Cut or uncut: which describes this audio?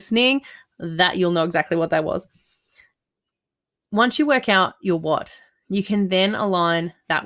uncut